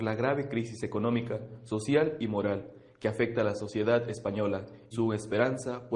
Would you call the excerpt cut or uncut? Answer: cut